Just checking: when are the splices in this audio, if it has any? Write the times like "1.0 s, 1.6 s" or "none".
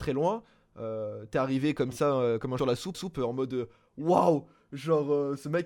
2.6 s, 2.9 s